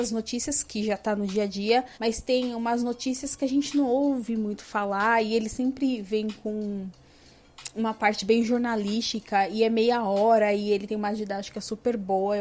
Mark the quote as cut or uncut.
cut